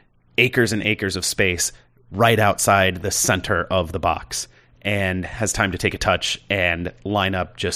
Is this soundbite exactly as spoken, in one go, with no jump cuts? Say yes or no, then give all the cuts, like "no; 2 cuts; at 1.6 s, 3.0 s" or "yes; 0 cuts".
yes; 0 cuts